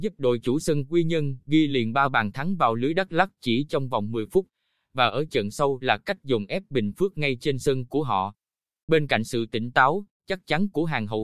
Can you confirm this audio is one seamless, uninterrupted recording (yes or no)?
yes